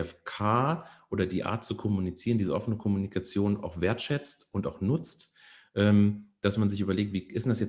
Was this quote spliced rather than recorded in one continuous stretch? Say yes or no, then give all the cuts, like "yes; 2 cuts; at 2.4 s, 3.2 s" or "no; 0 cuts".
no; 0 cuts